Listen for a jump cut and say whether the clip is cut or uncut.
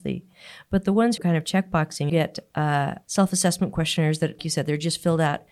cut